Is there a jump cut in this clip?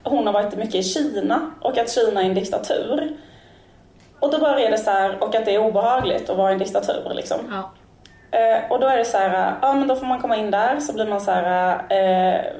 no; 0 cuts

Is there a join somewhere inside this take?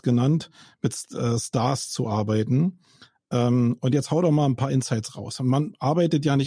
no; 0 cuts

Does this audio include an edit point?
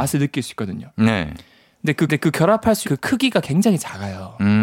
yes; 2 cuts; at 2.1 s, 2.8 s

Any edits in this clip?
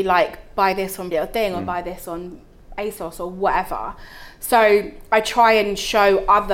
yes; 1 cut; at 1.1 s

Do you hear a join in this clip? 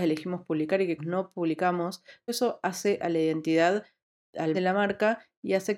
yes; 3 cuts; at 1.0 s, 2.3 s, 4.5 s

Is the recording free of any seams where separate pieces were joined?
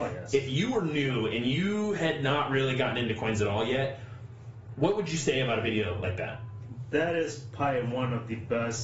yes; 0 cuts

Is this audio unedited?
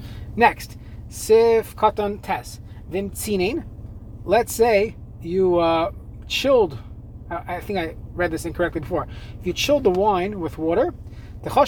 yes; 0 cuts

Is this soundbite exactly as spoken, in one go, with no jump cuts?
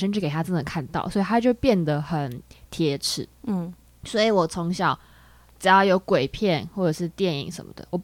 yes; 0 cuts

